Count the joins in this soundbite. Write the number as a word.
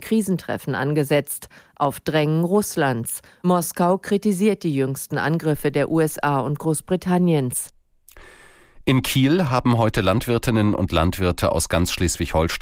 zero